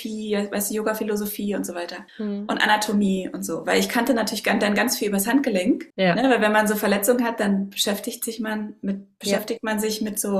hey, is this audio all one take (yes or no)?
no